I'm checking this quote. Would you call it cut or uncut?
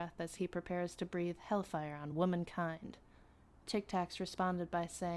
uncut